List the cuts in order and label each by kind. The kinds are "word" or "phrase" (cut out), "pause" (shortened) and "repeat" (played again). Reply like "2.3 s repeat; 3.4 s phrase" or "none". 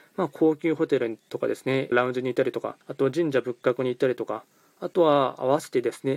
1.9 s phrase; 2.8 s pause